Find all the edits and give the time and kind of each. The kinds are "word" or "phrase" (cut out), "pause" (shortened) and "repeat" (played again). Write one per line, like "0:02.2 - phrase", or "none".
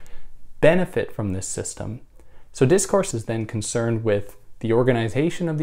0:03.1 - word